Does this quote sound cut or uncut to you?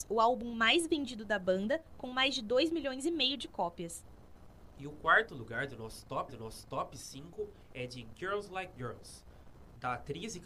cut